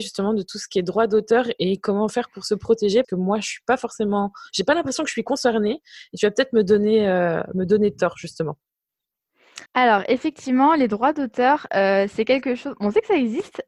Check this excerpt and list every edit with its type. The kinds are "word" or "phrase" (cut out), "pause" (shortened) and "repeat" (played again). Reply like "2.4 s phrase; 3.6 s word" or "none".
3.0 s word; 9.7 s pause